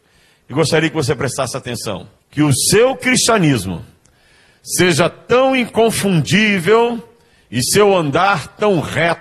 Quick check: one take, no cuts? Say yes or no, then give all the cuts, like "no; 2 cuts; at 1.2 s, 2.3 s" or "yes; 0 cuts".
no; 1 cut; at 2.2 s